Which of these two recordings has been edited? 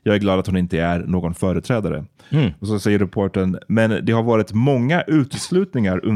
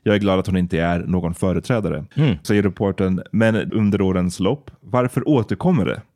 second; 3 cuts; at 2.1 s, 2.4 s, 3.7 s

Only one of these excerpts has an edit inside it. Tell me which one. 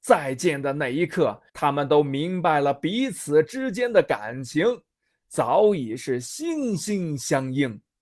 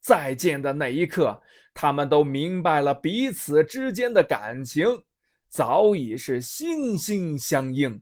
first; 1 cut; at 1.5 s

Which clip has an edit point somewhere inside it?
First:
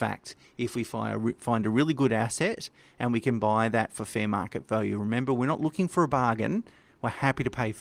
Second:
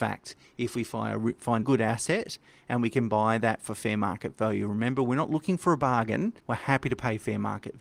second; 2 cuts; at 1.6 s, 6.4 s

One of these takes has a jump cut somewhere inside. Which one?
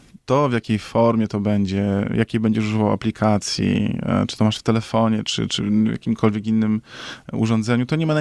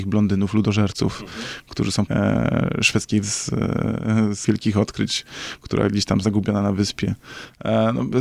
second; 4 cuts; at 2.1 s, 3.2 s, 4.4 s, 6.2 s

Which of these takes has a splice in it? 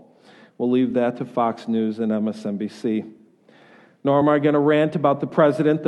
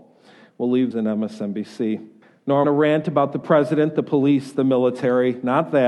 second; 3 cuts; at 0.9 s, 2.2 s, 2.6 s

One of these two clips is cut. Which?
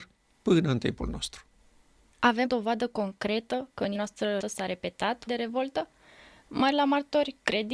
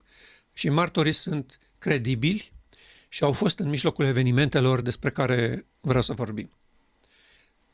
first; 5 cuts; at 2.4 s, 3.9 s, 4.4 s, 5.3 s, 6.7 s

